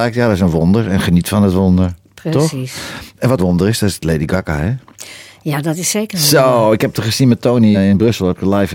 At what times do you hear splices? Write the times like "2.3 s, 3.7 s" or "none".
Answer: 3.4 s, 7.7 s